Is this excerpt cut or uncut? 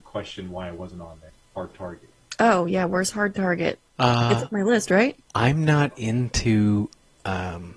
cut